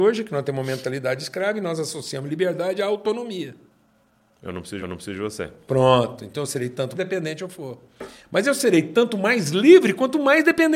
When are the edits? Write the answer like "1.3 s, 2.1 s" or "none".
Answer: 4.8 s, 6.9 s